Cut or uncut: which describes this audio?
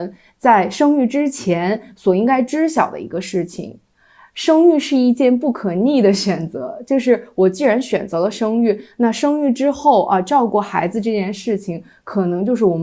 uncut